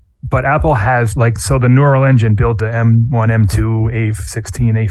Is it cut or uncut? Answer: cut